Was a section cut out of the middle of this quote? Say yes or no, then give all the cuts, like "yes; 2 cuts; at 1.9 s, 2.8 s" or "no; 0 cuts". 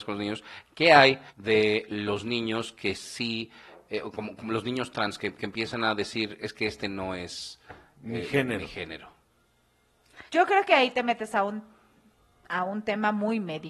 yes; 2 cuts; at 1.3 s, 10.3 s